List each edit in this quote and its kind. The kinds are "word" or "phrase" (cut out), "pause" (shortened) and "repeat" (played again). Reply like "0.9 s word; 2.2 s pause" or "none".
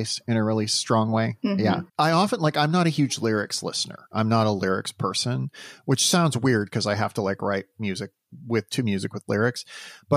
1.9 s pause